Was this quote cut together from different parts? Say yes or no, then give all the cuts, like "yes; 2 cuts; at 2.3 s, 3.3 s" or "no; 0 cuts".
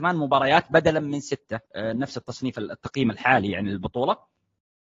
yes; 1 cut; at 1.7 s